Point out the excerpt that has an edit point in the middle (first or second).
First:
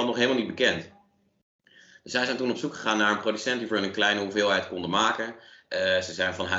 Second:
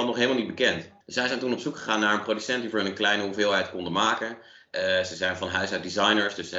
second